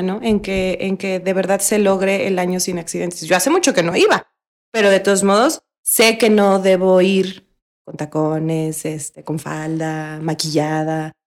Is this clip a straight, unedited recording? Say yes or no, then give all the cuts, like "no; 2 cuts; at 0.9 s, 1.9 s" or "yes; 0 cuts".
yes; 0 cuts